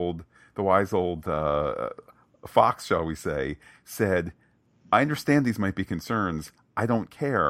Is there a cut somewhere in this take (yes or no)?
no